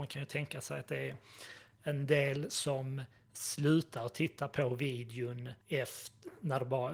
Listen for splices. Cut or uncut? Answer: cut